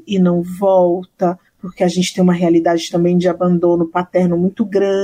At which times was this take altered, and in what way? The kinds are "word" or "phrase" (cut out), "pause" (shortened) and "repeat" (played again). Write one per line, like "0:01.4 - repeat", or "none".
0:01.5 - pause